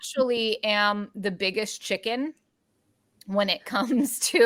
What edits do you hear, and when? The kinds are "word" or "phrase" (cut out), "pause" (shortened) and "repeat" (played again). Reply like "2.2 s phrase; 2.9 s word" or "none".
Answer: none